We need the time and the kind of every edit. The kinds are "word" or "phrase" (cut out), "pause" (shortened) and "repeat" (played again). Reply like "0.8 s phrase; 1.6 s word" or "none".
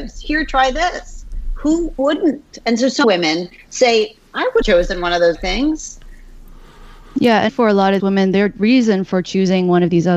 2.0 s word; 3.0 s word; 4.6 s word; 5.3 s word; 7.5 s word; 8.0 s word